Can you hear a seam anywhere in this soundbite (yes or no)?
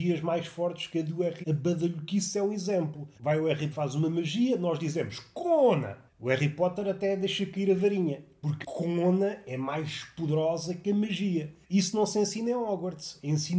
yes